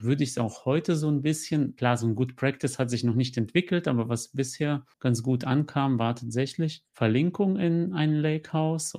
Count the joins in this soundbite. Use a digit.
1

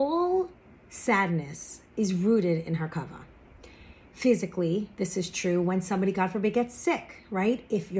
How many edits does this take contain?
0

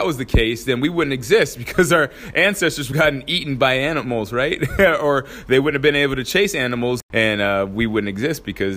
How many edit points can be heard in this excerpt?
1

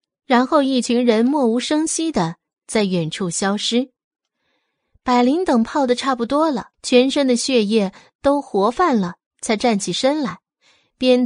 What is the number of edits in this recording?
1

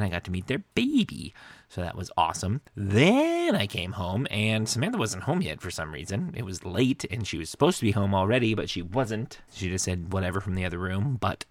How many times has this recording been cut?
2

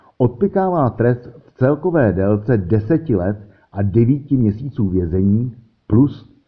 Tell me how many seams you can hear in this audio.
0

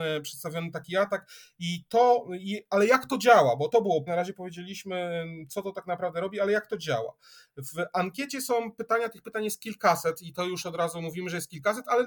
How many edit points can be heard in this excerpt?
2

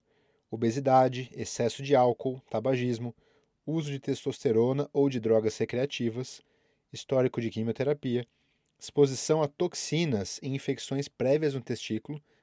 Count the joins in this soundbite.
0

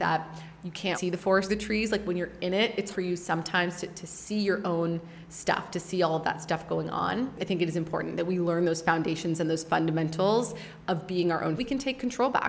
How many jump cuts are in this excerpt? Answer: 4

